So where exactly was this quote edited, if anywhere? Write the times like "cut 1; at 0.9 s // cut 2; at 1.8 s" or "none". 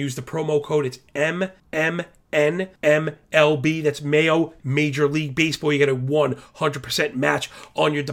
cut 1; at 1.6 s // cut 2; at 2.8 s // cut 3; at 4.6 s